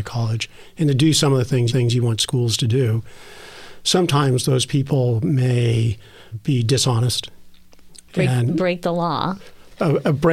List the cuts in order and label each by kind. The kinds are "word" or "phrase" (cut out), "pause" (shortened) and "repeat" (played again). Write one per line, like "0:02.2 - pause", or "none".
0:01.7 - repeat
0:06.3 - word